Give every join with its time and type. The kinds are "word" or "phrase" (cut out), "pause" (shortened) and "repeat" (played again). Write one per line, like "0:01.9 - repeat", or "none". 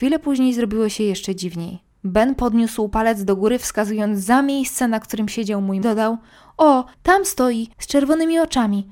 0:01.9 - pause
0:05.8 - phrase
0:06.9 - pause
0:07.7 - pause